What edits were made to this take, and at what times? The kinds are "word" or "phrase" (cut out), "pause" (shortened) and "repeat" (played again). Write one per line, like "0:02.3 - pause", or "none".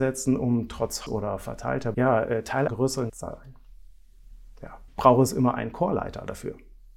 0:01.1 - word
0:01.9 - word
0:02.7 - word
0:03.1 - word
0:04.9 - word